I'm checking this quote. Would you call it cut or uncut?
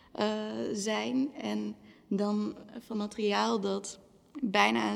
cut